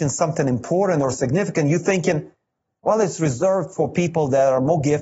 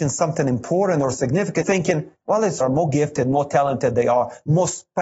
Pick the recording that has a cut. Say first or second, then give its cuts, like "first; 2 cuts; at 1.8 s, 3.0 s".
second; 3 cuts; at 1.6 s, 2.2 s, 2.6 s